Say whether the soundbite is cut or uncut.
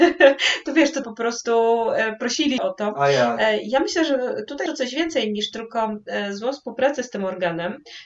cut